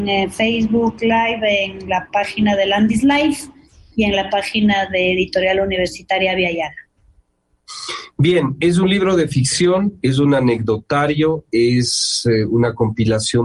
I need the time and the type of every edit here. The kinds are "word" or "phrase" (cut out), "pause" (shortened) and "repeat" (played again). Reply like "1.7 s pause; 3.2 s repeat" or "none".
none